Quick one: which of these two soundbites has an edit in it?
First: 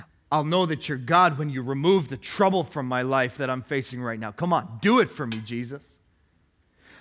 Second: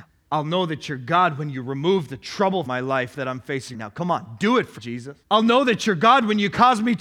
second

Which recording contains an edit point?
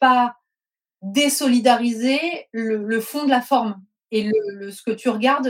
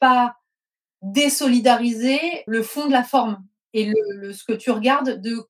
second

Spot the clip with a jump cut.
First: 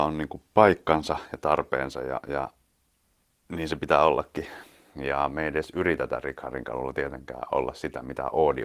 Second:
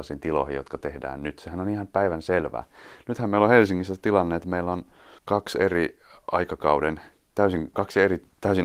second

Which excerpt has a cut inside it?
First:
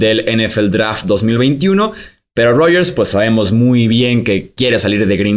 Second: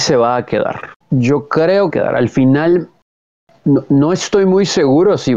second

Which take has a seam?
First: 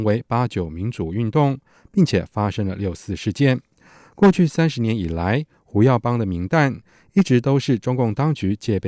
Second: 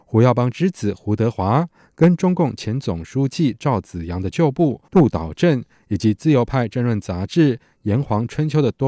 second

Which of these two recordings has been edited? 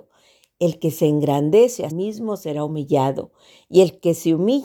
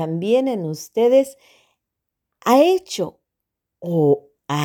first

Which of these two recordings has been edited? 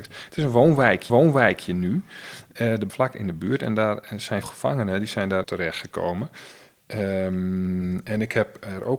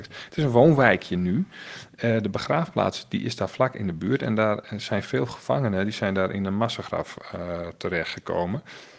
first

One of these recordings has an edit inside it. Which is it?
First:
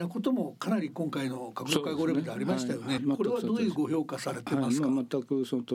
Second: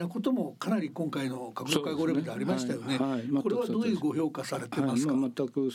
first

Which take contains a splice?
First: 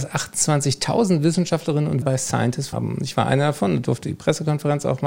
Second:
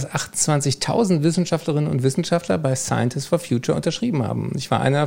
first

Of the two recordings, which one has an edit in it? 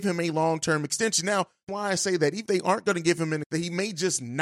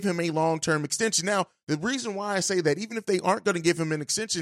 first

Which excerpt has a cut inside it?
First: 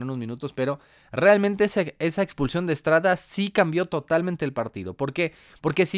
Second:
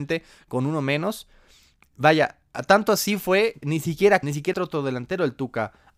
second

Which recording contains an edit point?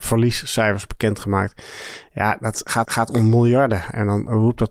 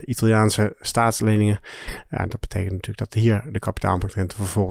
first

